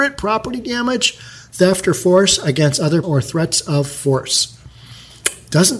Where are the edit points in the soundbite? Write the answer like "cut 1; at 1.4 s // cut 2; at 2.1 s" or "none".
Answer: cut 1; at 3.0 s